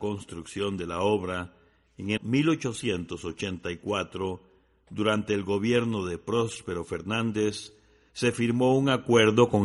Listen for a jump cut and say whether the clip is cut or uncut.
cut